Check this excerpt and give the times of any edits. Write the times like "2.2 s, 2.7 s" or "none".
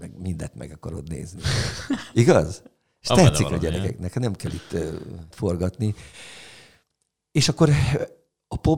5.3 s